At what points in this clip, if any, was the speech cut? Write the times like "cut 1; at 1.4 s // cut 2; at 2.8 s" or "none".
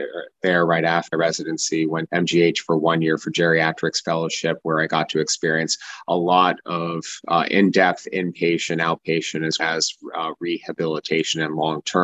cut 1; at 1.1 s // cut 2; at 2.1 s // cut 3; at 9.6 s